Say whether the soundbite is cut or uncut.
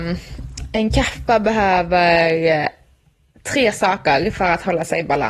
uncut